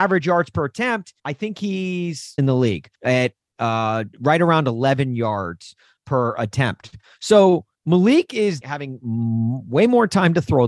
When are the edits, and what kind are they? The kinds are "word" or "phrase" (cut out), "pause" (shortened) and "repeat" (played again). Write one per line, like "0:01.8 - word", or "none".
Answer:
0:01.2 - pause
0:02.4 - phrase
0:02.9 - word
0:04.1 - pause
0:06.0 - word
0:07.7 - pause
0:08.6 - word